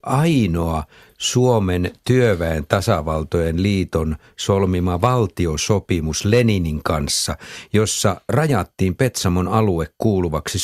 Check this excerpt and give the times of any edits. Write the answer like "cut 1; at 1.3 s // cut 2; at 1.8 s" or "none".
none